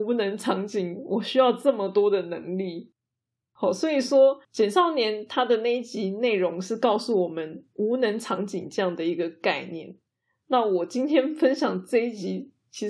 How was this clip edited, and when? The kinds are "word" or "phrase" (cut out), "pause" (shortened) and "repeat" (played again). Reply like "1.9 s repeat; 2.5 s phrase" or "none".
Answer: 4.4 s pause